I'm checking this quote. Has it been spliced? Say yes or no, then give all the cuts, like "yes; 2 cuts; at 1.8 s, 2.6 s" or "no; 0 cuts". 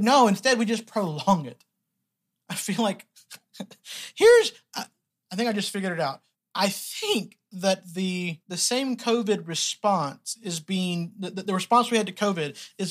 yes; 2 cuts; at 6.3 s, 8.4 s